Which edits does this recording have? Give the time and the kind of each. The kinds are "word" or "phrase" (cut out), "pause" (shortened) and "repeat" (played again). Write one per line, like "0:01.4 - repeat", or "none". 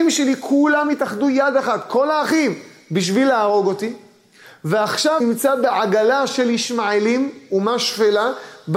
0:05.2 - word